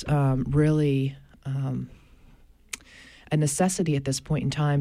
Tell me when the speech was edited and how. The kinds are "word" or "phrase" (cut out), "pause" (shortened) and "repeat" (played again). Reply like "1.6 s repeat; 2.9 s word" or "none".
none

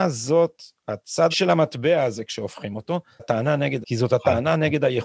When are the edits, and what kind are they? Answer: 1.3 s word; 3.2 s word; 3.8 s word

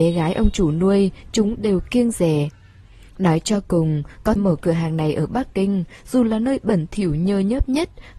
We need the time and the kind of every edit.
4.4 s word

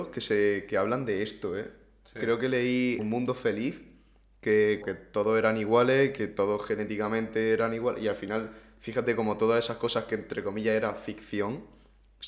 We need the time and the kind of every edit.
3.0 s word; 4.8 s word

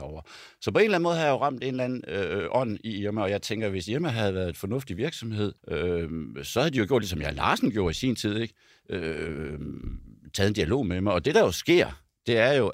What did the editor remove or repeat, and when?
5.6 s pause

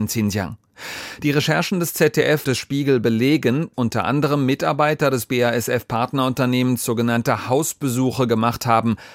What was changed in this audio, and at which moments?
2.4 s word; 3.7 s word

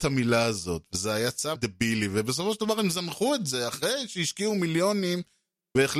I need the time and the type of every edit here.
1.6 s phrase

